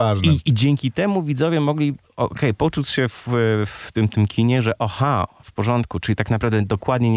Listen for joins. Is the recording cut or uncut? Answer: uncut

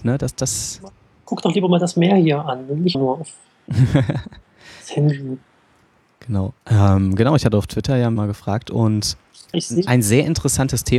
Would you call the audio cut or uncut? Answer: cut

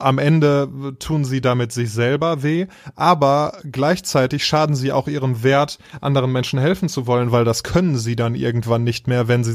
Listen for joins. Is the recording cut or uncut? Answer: uncut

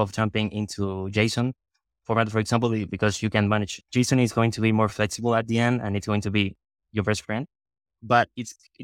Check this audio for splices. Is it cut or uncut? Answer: uncut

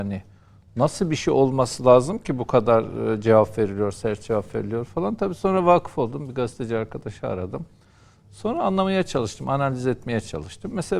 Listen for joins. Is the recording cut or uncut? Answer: uncut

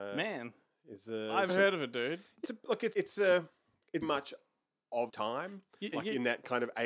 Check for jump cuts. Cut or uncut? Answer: cut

